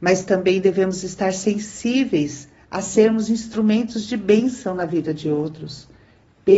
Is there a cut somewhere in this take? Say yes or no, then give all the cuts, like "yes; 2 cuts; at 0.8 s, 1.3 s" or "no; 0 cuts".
no; 0 cuts